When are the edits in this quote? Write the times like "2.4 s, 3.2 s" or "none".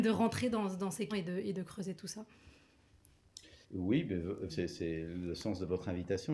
1.1 s, 3.6 s, 4.5 s